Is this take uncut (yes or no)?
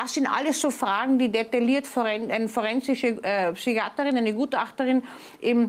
yes